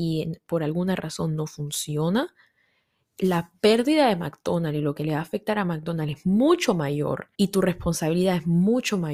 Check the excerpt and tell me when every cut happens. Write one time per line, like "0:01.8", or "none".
0:07.3